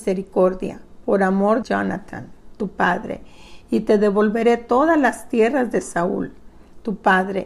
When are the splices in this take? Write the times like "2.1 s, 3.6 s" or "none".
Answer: 1.6 s